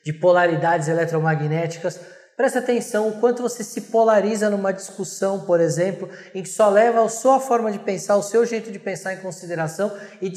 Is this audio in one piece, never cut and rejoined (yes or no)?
yes